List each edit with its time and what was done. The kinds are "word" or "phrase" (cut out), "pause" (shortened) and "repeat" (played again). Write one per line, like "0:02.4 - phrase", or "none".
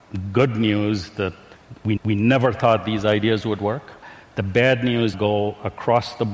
0:02.0 - repeat
0:05.1 - phrase